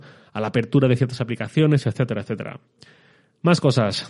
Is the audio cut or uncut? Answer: uncut